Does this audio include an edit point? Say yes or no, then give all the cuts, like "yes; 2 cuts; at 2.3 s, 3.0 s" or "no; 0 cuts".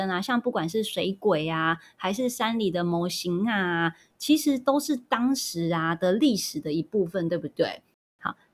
no; 0 cuts